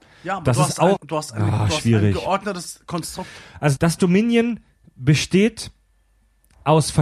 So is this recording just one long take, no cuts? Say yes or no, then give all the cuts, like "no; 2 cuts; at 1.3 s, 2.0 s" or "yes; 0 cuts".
no; 2 cuts; at 1.0 s, 3.8 s